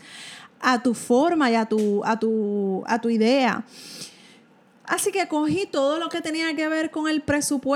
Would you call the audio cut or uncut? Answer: uncut